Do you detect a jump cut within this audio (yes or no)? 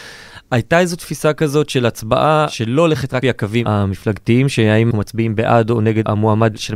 yes